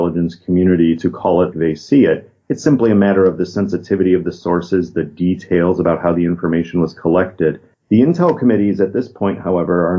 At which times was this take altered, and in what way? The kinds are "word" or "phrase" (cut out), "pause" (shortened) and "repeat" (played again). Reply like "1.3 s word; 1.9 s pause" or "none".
1.5 s word; 7.7 s pause